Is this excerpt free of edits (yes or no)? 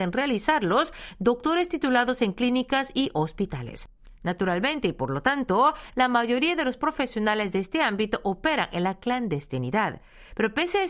yes